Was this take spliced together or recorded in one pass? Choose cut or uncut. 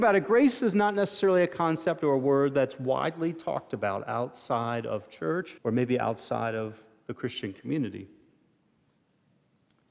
cut